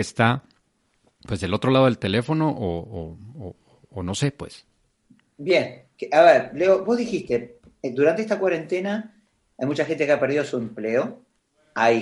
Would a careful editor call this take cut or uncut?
uncut